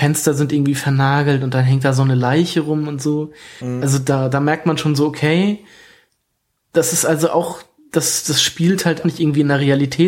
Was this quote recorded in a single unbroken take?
no; 1 cut; at 9.0 s

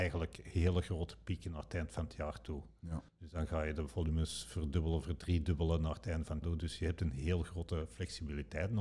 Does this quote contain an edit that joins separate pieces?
yes; 2 cuts; at 3.1 s, 6.4 s

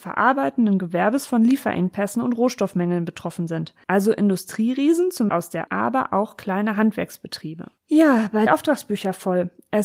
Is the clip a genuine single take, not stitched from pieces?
no; 4 cuts; at 5.3 s, 5.7 s, 7.8 s, 8.5 s

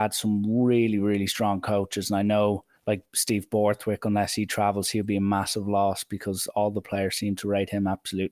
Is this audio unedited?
no; 1 cut; at 2.8 s

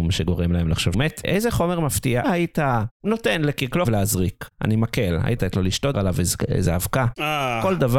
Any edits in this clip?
yes; 6 cuts; at 0.9 s, 2.2 s, 2.9 s, 3.8 s, 5.4 s, 5.9 s

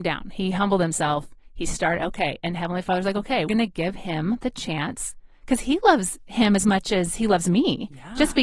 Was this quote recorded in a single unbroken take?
no; 1 cut; at 3.5 s

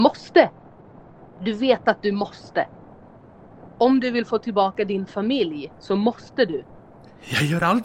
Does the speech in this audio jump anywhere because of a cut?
no; 0 cuts

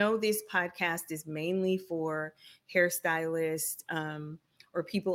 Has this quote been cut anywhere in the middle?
no; 0 cuts

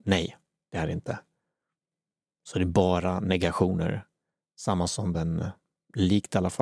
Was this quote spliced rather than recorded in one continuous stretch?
no; 0 cuts

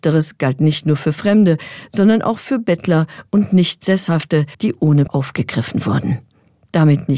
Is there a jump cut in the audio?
yes; 2 cuts; at 4.5 s, 5.1 s

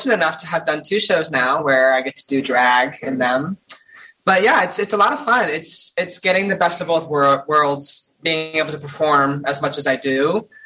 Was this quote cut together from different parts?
no; 0 cuts

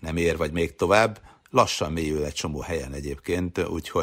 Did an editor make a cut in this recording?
no; 0 cuts

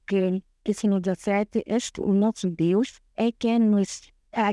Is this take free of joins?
no; 1 cut; at 3.1 s

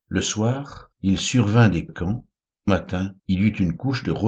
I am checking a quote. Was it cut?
yes; 4 cuts; at 0.9 s, 1.9 s, 2.7 s, 3.2 s

